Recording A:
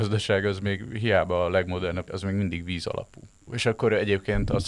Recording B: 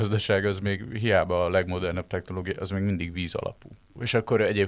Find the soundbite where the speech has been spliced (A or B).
A